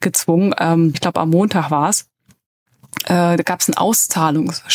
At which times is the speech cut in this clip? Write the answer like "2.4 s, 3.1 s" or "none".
0.9 s

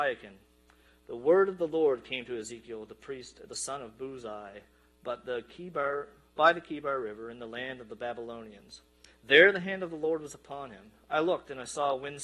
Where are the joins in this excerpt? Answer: none

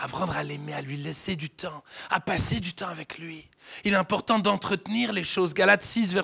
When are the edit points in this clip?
none

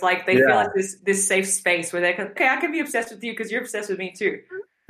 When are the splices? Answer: 2.4 s

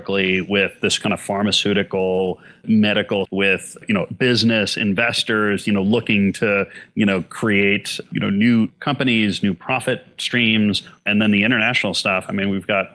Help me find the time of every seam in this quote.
3.2 s

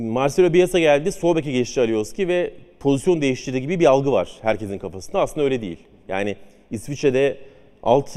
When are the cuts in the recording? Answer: none

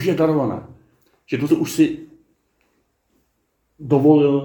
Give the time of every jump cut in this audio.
1.5 s

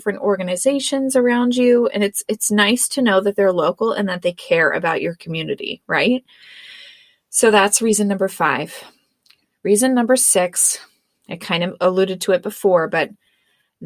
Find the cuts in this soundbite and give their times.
none

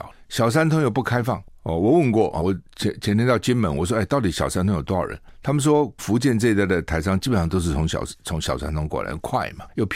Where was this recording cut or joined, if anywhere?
2.4 s, 6.0 s

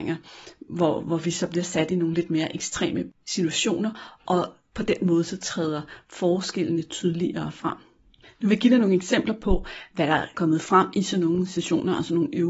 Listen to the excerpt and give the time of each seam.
10.3 s

